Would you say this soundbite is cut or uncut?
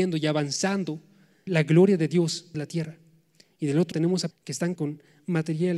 cut